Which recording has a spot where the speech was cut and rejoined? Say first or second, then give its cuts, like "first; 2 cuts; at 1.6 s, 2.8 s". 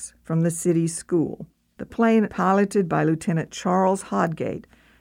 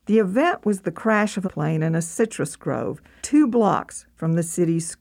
second; 2 cuts; at 1.4 s, 3.2 s